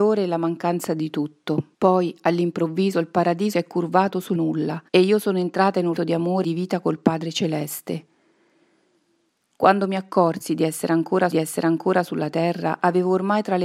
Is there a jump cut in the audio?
yes; 7 cuts; at 1.7 s, 3.5 s, 4.3 s, 4.9 s, 6.0 s, 6.4 s, 11.3 s

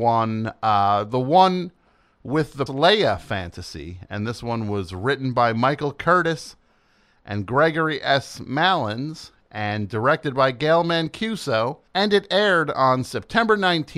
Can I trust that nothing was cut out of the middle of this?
no; 2 cuts; at 2.7 s, 11.9 s

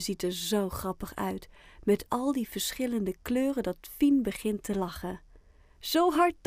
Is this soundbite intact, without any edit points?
yes; 0 cuts

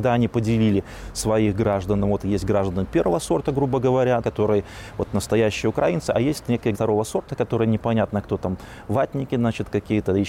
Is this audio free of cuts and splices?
no; 2 cuts; at 4.2 s, 6.7 s

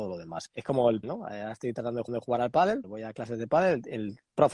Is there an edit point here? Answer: yes; 3 cuts; at 1.0 s, 2.1 s, 2.8 s

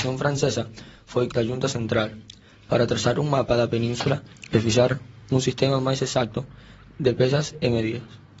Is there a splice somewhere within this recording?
yes; 1 cut; at 1.3 s

